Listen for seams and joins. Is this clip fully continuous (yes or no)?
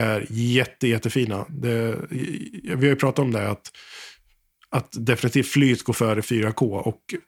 yes